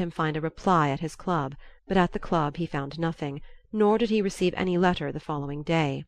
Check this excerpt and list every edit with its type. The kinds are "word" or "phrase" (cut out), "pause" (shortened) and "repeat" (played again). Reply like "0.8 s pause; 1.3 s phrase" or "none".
1.8 s pause